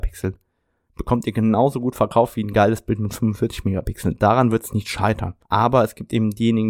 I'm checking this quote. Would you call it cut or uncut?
cut